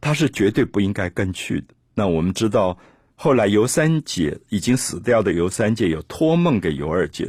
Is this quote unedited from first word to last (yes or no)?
yes